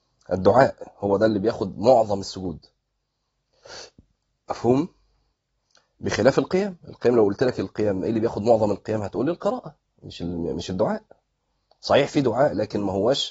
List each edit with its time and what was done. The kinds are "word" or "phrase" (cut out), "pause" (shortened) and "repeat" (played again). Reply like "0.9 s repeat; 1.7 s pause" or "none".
none